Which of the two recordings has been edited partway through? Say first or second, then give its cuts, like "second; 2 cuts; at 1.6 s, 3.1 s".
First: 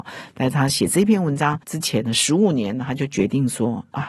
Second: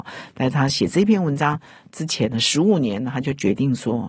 first; 1 cut; at 1.6 s